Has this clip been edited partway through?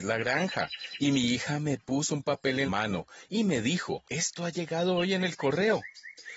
yes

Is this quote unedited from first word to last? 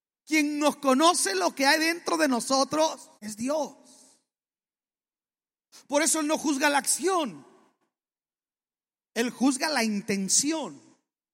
no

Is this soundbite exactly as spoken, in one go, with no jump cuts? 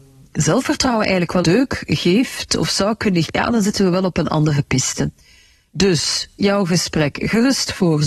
no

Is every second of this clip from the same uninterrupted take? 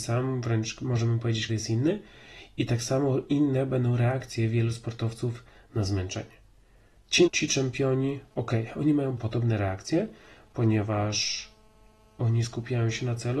no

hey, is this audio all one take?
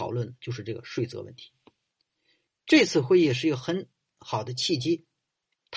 yes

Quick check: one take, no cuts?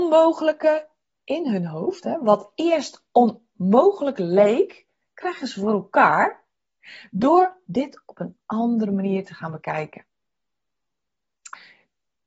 yes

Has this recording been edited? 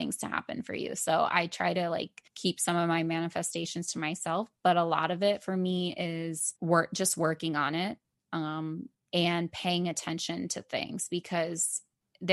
yes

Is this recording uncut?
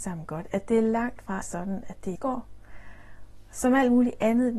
no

